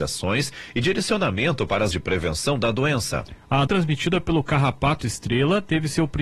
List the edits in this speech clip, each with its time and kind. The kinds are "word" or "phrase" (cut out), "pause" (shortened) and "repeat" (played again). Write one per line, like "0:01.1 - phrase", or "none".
0:01.9 - word
0:03.7 - word